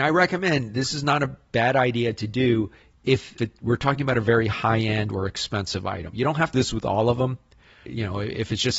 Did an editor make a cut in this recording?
yes; 3 cuts; at 3.4 s, 6.5 s, 7.9 s

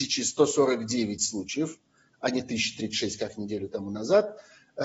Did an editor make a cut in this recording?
no; 0 cuts

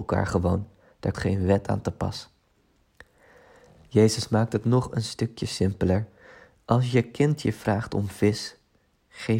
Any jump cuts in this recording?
yes; 1 cut; at 1.1 s

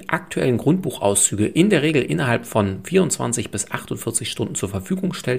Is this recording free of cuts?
yes; 0 cuts

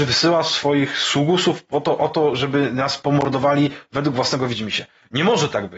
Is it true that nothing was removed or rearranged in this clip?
yes; 0 cuts

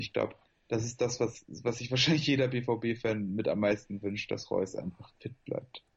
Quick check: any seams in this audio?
no; 0 cuts

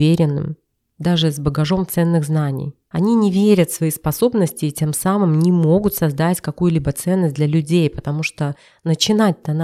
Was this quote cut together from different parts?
no; 0 cuts

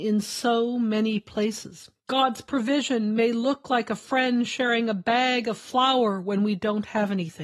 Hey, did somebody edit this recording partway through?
yes; 1 cut; at 2.0 s

